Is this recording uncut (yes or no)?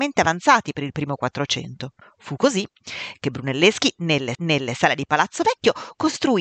no